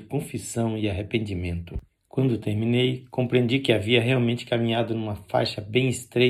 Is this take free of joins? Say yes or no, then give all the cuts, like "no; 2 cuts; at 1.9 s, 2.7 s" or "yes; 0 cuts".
no; 1 cut; at 1.9 s